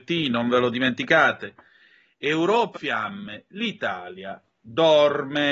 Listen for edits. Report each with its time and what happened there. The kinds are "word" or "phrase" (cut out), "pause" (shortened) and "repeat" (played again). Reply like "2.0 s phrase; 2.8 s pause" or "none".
2.7 s word